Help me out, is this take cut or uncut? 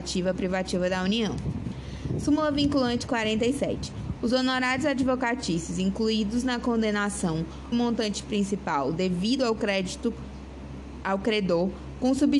cut